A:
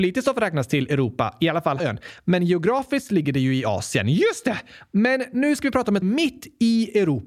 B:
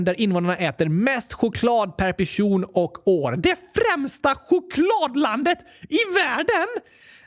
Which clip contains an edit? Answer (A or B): A